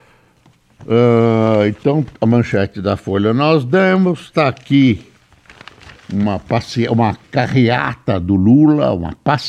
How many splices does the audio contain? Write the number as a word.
one